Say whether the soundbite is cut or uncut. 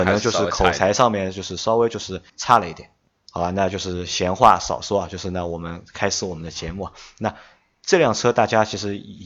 cut